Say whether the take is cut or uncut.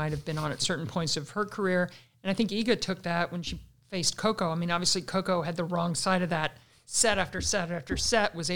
uncut